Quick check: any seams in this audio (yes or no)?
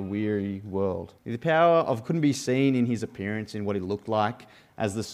yes